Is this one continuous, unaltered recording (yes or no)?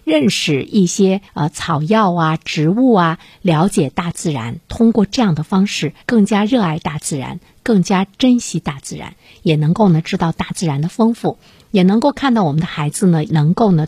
no